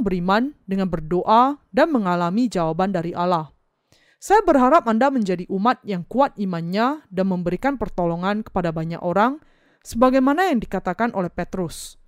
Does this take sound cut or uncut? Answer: uncut